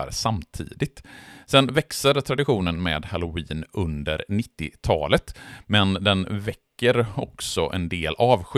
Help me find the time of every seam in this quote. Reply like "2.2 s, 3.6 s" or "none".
none